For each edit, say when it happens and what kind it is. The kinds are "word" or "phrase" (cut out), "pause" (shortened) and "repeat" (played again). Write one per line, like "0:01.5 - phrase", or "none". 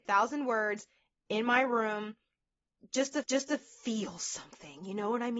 0:03.2 - repeat